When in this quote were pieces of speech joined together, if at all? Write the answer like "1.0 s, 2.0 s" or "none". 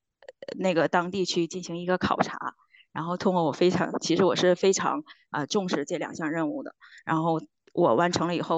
none

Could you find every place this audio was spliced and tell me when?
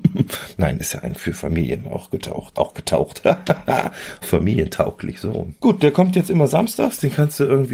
1.2 s, 2.5 s, 4.2 s, 5.6 s

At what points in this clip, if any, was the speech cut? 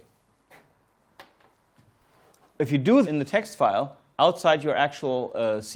3.0 s

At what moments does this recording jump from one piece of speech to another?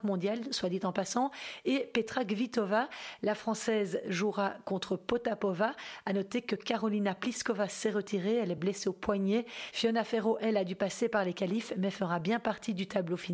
none

